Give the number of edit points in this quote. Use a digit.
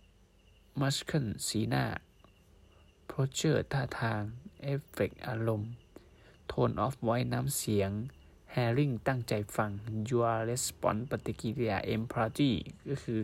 0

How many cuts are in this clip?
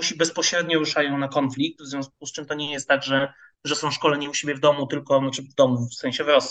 0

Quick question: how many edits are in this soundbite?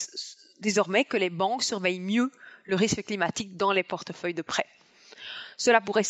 0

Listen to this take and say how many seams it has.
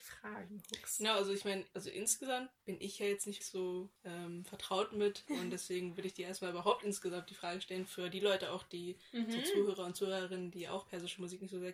4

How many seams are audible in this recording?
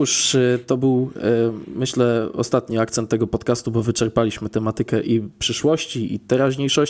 0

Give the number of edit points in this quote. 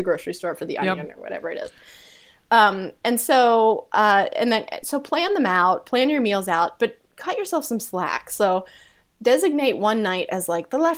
0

